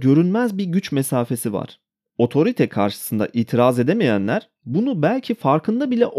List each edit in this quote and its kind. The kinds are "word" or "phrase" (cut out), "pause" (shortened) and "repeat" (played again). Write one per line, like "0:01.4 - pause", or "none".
none